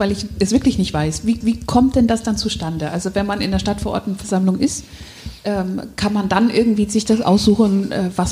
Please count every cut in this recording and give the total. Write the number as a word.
one